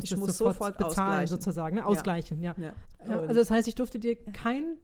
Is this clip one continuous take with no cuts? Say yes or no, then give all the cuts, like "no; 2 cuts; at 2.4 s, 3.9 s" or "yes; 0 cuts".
yes; 0 cuts